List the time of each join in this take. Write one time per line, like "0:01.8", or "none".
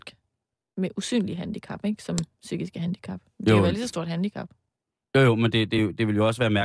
none